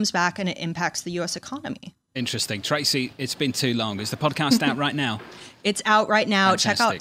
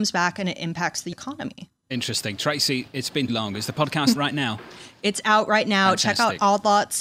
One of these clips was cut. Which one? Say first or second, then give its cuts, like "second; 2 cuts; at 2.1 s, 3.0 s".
second; 3 cuts; at 1.1 s, 3.3 s, 4.2 s